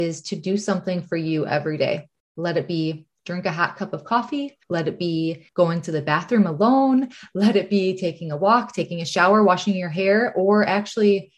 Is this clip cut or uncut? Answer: cut